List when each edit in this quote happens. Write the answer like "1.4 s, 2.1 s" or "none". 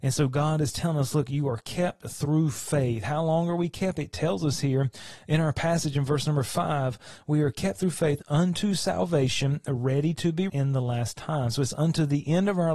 10.5 s